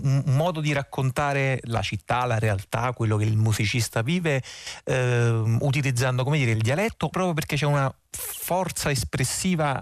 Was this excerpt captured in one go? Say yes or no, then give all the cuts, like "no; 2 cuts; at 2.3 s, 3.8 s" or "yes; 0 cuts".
no; 1 cut; at 7.1 s